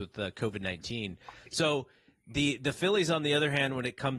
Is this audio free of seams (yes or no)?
yes